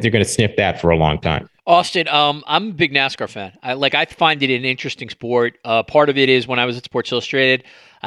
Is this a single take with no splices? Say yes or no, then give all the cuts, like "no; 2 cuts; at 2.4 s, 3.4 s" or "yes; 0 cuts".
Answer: no; 1 cut; at 1.6 s